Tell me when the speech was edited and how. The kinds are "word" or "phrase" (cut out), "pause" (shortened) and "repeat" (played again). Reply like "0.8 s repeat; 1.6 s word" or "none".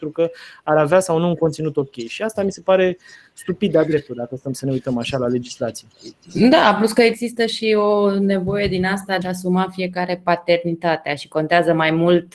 9.2 s word